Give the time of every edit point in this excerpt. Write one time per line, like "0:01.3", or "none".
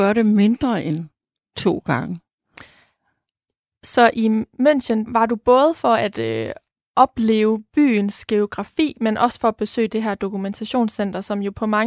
0:05.1